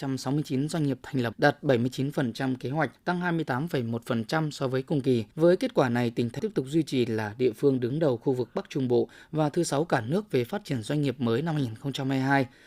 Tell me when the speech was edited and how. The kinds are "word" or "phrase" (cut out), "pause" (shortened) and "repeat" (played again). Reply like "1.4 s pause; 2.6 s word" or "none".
1.3 s word; 3.0 s pause; 5.3 s pause; 6.4 s word